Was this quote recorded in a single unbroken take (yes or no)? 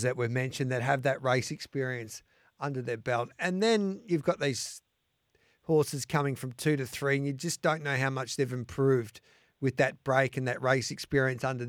yes